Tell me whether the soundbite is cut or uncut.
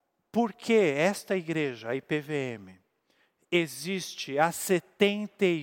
uncut